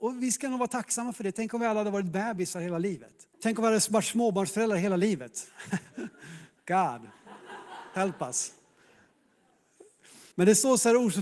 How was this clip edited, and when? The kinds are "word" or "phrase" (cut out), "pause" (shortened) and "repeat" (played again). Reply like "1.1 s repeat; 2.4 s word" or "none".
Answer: 3.3 s pause; 6.6 s pause; 10.3 s pause

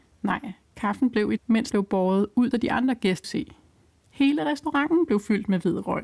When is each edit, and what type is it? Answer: 1.4 s phrase; 1.7 s word; 2.5 s phrase; 3.2 s word

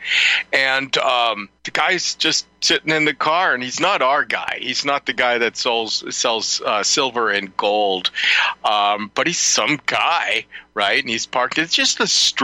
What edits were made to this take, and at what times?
1.6 s pause

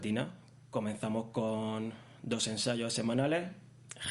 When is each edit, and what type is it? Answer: none

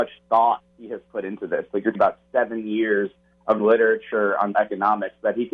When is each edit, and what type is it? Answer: 1.9 s word; 3.6 s word; 4.5 s word

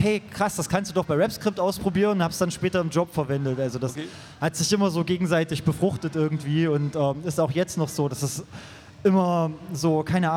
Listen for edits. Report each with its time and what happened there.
none

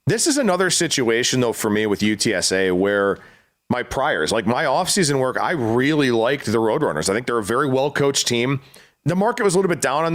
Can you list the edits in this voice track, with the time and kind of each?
none

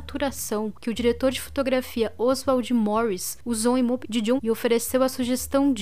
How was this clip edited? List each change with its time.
4.0 s word; 4.4 s word

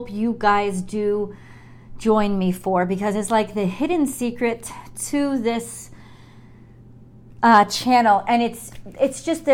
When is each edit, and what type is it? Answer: none

